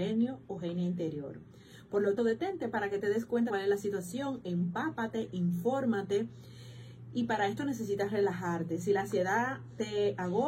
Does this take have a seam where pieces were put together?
yes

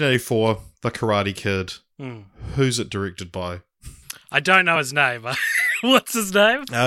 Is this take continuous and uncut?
yes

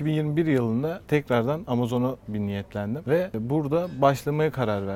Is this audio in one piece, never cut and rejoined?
yes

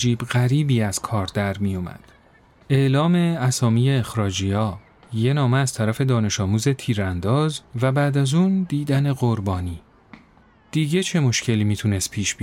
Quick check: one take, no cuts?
yes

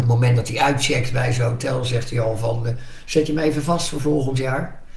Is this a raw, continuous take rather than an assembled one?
yes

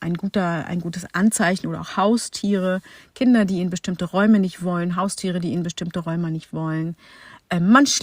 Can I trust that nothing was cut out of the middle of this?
yes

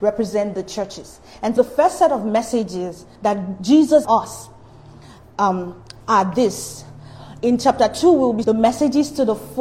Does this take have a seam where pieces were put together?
yes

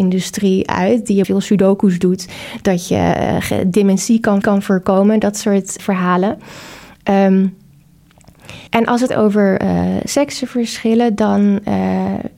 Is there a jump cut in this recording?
yes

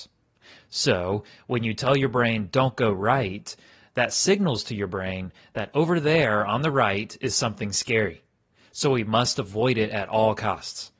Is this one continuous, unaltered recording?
yes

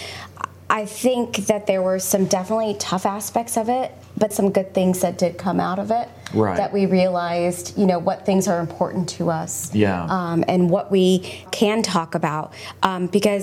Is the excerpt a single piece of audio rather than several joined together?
no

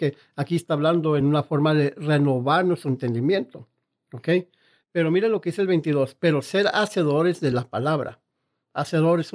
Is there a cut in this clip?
no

